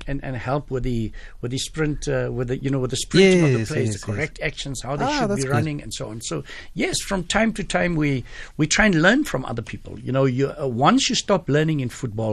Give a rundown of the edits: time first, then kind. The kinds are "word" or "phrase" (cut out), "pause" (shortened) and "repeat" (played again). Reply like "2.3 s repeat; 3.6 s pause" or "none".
none